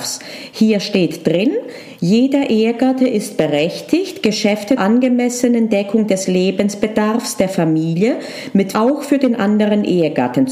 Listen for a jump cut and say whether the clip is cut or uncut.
cut